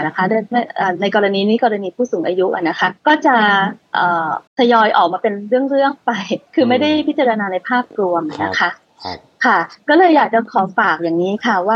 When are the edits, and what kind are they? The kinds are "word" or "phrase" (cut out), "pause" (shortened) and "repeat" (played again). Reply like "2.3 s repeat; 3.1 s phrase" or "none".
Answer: 3.0 s pause; 4.5 s pause; 6.5 s pause